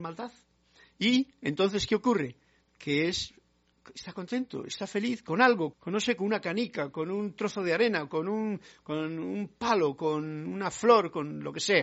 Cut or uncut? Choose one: cut